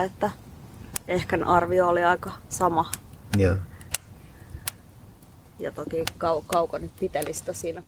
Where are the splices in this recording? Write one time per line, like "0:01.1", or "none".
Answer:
none